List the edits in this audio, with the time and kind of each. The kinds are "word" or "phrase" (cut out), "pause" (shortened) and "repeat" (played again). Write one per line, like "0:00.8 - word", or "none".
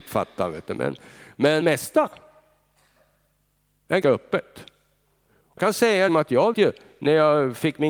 0:01.6 - word
0:04.0 - word
0:05.6 - word
0:06.1 - word
0:06.5 - word